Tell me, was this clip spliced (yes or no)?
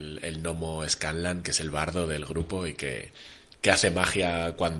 no